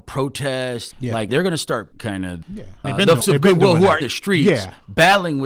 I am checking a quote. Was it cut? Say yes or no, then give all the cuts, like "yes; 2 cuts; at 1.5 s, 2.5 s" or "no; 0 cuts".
yes; 7 cuts; at 0.9 s, 1.3 s, 1.9 s, 2.4 s, 2.8 s, 3.2 s, 4.0 s